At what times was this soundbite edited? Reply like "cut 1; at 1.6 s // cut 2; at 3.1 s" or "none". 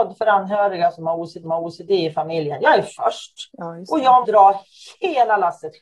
cut 1; at 1.4 s // cut 2; at 3.5 s // cut 3; at 4.2 s